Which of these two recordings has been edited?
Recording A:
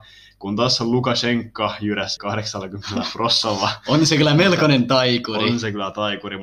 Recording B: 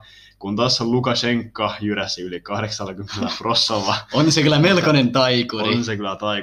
A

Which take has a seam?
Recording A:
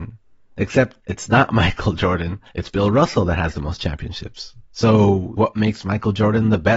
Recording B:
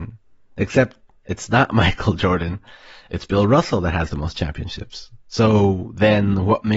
A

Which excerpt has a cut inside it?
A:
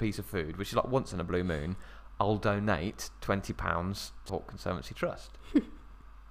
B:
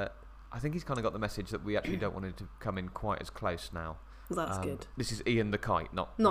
A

